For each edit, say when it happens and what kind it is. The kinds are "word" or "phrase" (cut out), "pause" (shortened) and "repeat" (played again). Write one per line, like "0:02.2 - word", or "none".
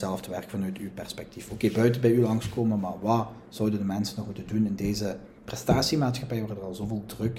0:05.4 - pause